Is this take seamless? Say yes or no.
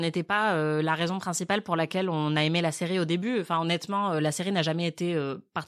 yes